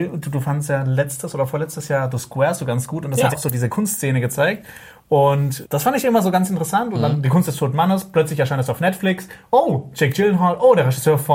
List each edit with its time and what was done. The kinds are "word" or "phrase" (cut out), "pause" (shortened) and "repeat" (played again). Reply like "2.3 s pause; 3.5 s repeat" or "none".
3.3 s word; 5.6 s word